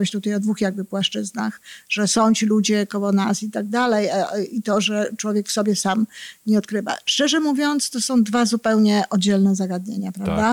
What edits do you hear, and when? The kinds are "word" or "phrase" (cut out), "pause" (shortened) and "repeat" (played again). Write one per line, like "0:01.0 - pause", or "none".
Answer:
none